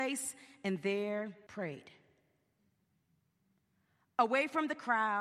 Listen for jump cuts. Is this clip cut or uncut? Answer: cut